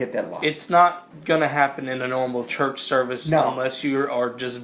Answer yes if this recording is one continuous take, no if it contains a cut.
yes